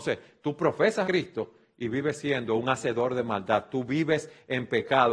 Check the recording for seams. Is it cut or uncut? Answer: cut